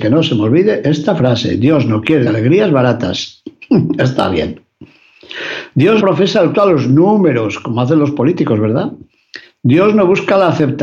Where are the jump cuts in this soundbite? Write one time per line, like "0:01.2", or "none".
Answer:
0:02.3
0:06.0
0:06.5